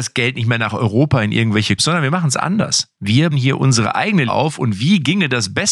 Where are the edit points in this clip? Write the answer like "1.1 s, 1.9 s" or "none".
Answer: 1.8 s, 3.3 s, 4.3 s